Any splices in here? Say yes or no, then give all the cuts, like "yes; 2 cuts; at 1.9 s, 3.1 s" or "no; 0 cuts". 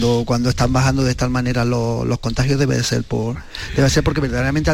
no; 0 cuts